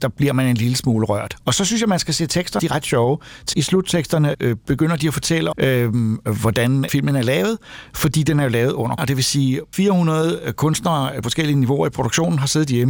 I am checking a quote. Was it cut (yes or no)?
yes